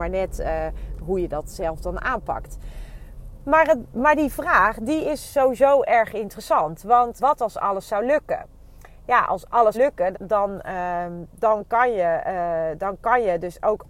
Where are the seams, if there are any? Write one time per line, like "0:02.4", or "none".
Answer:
0:07.2
0:09.7
0:10.1